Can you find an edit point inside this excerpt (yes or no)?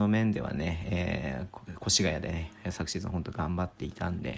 no